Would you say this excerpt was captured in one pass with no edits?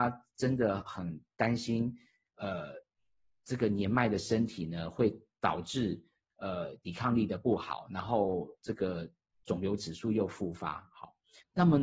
yes; 0 cuts

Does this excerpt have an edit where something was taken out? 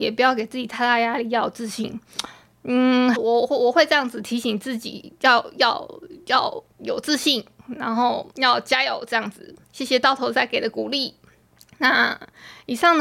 yes; 5 cuts; at 3.1 s, 6.7 s, 8.3 s, 9.6 s, 11.5 s

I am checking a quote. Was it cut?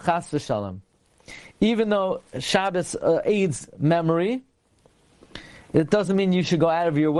no; 0 cuts

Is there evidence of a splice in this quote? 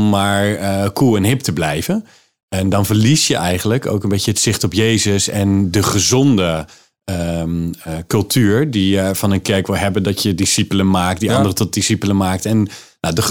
no; 0 cuts

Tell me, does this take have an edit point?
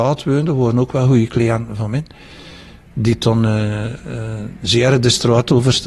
no; 0 cuts

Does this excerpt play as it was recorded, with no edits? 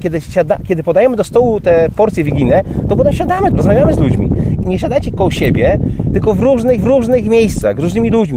no; 3 cuts; at 3.5 s, 4.6 s, 6.8 s

